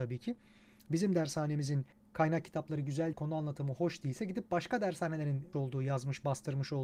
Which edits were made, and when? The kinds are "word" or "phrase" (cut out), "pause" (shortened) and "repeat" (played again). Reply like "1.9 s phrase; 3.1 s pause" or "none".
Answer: 1.9 s pause; 3.1 s word; 5.5 s word